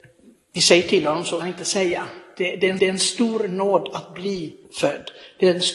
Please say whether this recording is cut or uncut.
cut